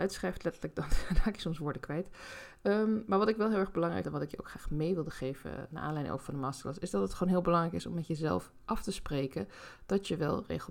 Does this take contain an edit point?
yes; 2 cuts; at 4.0 s, 5.7 s

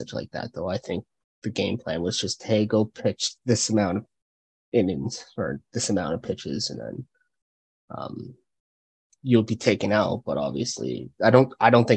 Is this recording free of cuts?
yes; 0 cuts

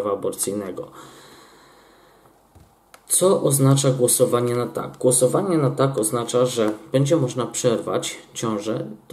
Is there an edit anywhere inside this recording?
no; 0 cuts

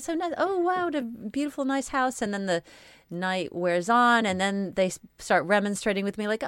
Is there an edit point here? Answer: no; 0 cuts

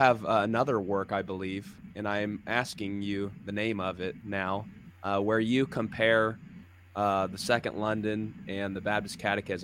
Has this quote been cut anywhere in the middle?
no; 0 cuts

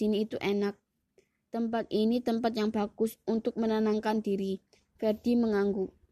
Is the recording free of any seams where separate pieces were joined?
yes; 0 cuts

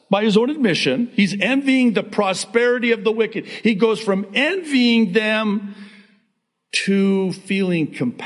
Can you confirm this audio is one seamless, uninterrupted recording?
yes; 0 cuts

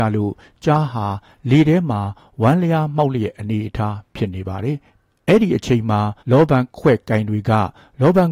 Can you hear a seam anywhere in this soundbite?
yes; 2 cuts; at 4.9 s, 6.2 s

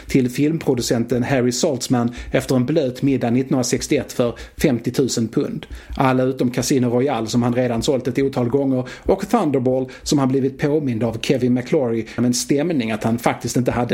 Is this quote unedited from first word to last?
no; 1 cut; at 12.2 s

